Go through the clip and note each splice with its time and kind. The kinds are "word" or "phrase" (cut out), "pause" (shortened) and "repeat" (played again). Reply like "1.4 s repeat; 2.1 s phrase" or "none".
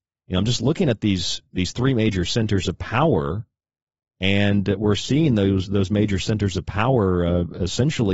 none